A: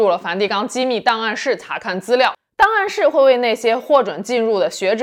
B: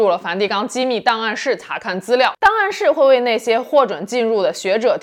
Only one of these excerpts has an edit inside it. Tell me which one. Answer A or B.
B